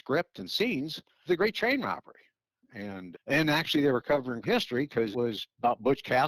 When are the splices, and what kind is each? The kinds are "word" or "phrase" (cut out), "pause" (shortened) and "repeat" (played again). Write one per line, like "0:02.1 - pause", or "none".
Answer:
0:01.3 - word
0:03.1 - word
0:04.4 - word
0:05.1 - word